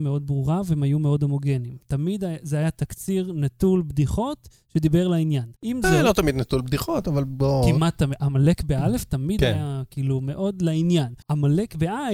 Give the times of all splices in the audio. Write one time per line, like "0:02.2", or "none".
0:05.6
0:11.2